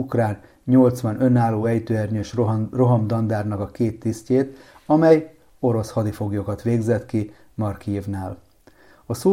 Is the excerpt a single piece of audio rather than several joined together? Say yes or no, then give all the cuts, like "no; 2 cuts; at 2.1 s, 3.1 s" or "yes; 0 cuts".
yes; 0 cuts